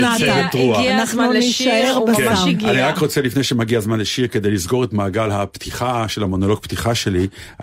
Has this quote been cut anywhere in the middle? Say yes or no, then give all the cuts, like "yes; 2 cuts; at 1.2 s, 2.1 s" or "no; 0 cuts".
no; 0 cuts